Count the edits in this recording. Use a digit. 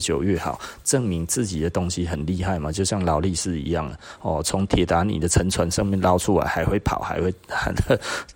0